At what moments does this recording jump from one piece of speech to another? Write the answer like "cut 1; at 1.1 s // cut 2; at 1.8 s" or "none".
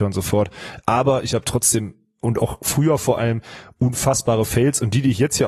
none